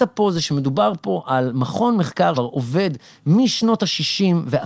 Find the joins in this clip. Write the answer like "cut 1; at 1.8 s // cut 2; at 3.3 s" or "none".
cut 1; at 2.3 s